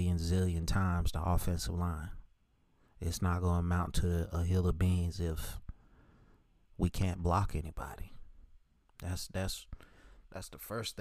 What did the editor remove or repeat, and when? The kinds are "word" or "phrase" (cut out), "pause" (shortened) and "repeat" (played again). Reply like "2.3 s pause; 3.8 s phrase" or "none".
none